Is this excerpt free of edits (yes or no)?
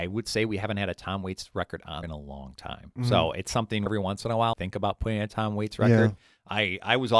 no